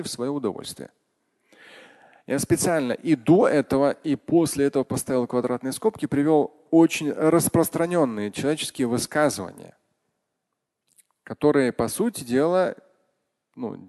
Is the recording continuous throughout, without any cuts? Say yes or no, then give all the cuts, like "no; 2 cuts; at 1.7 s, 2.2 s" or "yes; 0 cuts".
yes; 0 cuts